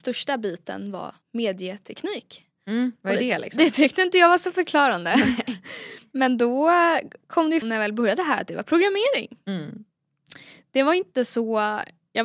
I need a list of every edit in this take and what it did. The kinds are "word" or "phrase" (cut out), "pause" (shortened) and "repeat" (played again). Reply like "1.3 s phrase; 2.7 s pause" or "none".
1.2 s pause; 7.6 s word